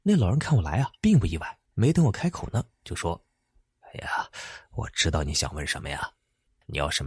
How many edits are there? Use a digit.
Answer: 2